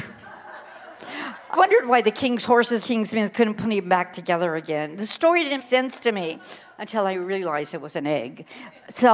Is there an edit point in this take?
yes; 3 cuts; at 1.5 s, 2.8 s, 5.6 s

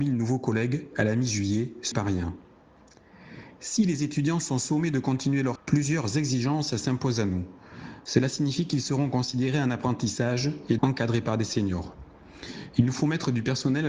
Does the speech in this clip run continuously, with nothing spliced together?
no; 3 cuts; at 1.9 s, 5.6 s, 10.8 s

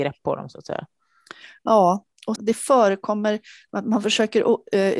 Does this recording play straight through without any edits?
no; 1 cut; at 2.4 s

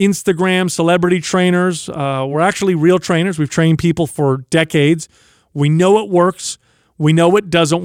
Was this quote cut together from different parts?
no; 0 cuts

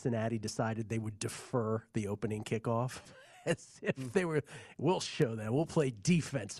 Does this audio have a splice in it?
no; 0 cuts

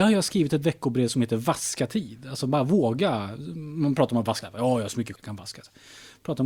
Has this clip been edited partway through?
yes; 2 cuts; at 4.4 s, 5.2 s

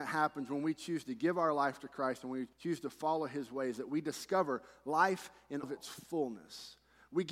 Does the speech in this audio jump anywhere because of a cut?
yes; 2 cuts; at 2.5 s, 5.6 s

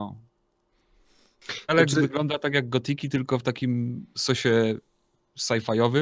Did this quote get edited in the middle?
no; 0 cuts

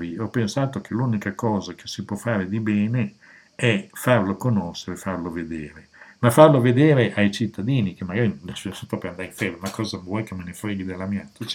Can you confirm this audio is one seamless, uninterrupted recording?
yes; 0 cuts

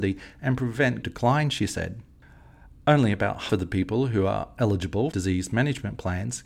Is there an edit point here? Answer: yes; 3 cuts; at 1.0 s, 3.5 s, 5.1 s

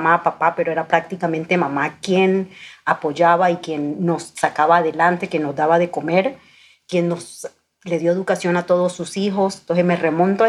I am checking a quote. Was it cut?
no; 0 cuts

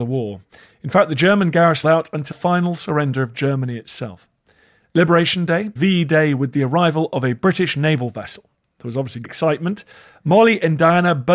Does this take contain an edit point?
yes; 4 cuts; at 1.8 s, 2.3 s, 5.8 s, 9.2 s

